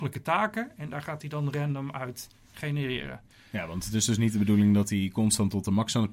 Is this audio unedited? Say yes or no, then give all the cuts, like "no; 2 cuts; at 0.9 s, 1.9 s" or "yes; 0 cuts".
yes; 0 cuts